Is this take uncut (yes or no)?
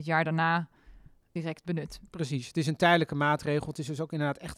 no